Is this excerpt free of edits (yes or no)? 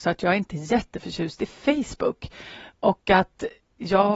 yes